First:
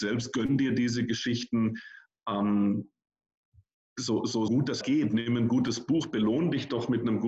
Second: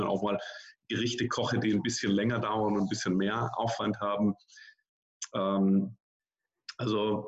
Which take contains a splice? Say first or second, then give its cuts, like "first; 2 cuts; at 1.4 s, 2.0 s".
first; 2 cuts; at 4.5 s, 4.8 s